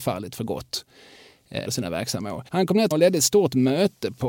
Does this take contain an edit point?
yes; 3 cuts; at 1.7 s, 2.5 s, 2.9 s

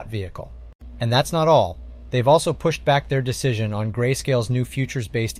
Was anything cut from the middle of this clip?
no; 0 cuts

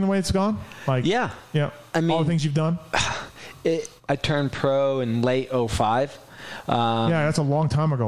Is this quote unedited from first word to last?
no; 1 cut; at 4.0 s

